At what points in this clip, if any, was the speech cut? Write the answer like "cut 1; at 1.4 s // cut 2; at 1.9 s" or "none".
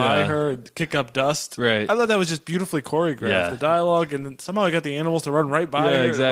none